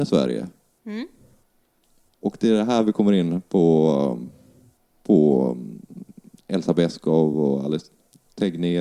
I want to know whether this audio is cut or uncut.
uncut